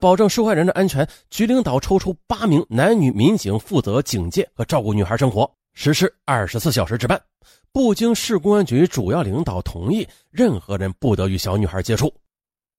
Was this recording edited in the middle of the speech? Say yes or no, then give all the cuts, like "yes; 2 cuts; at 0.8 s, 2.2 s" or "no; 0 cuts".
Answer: no; 0 cuts